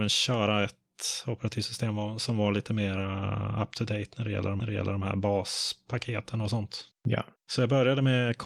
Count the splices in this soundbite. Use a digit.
1